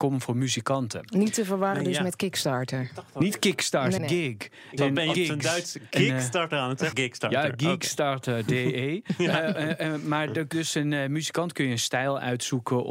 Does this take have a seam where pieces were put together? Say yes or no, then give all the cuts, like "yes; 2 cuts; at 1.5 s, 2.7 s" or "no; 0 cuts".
yes; 6 cuts; at 4.0 s, 4.8 s, 5.1 s, 5.9 s, 6.9 s, 10.5 s